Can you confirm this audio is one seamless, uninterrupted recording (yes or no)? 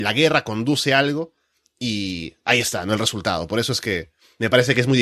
yes